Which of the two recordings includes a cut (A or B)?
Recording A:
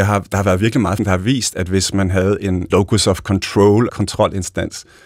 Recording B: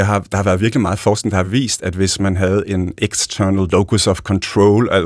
A